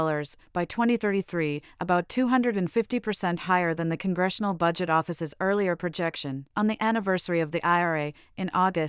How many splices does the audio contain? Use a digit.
1